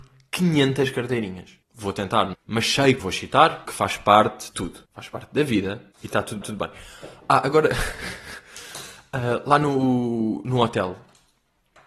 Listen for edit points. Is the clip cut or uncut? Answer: cut